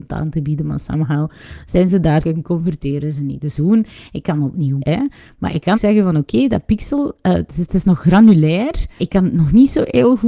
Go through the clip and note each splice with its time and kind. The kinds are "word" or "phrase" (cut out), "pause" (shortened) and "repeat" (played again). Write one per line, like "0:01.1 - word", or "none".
0:02.2 - word
0:03.5 - phrase
0:04.8 - word
0:05.7 - word
0:09.0 - word